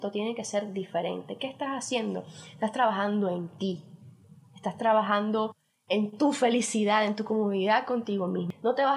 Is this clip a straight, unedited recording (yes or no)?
yes